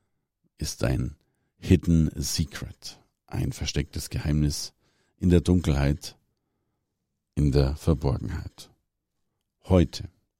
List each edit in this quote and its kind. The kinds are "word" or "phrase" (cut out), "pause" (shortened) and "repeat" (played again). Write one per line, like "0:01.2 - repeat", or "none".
none